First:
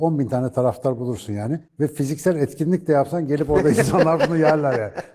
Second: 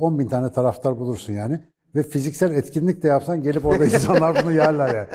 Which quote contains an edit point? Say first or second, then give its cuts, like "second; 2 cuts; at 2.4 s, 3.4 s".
first; 1 cut; at 1.7 s